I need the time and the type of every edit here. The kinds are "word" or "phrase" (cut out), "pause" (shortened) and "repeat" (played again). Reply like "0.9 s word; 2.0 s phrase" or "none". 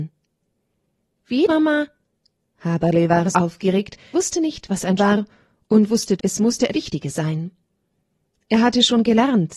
1.5 s word; 3.3 s word; 4.1 s word; 5.0 s word; 6.2 s word; 6.7 s word